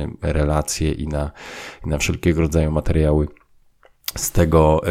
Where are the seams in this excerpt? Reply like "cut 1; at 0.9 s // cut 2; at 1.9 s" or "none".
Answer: none